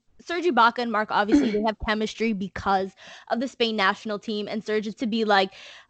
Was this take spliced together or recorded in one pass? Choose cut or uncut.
cut